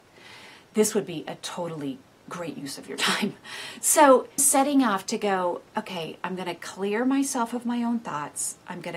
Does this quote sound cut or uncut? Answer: cut